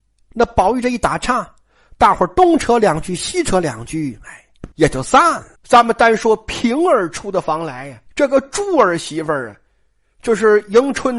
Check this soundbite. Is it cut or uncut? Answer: cut